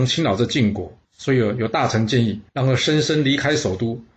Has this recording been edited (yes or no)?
yes